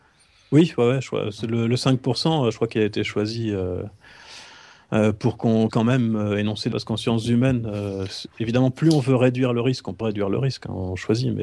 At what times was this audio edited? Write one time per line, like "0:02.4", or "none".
0:05.7
0:06.7
0:10.0

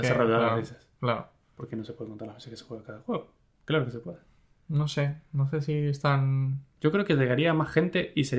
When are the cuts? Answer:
none

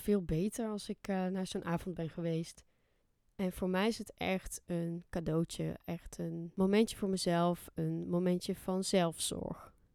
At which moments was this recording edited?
none

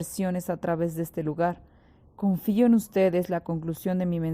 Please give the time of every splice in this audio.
none

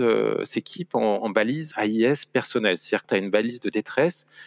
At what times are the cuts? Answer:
0:01.7
0:03.0

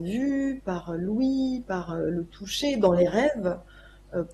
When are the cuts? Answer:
none

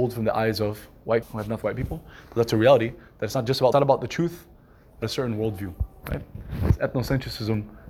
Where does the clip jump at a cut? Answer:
0:01.2
0:01.6
0:03.7
0:05.0

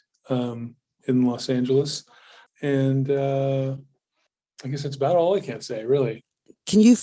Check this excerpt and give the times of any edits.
none

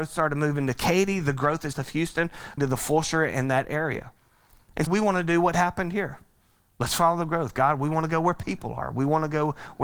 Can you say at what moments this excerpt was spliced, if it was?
0:01.7
0:02.6
0:04.9

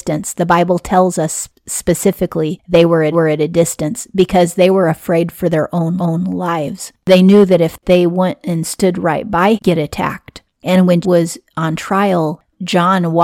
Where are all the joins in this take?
0:03.1
0:06.0
0:09.6
0:10.5
0:11.0

